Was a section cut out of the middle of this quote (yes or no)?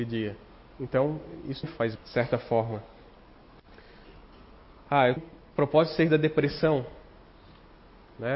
yes